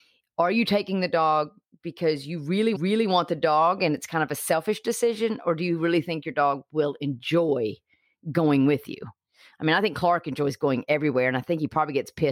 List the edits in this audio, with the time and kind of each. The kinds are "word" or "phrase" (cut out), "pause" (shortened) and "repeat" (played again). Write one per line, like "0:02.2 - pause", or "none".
0:02.7 - repeat